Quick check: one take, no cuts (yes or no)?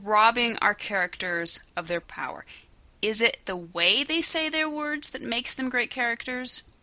no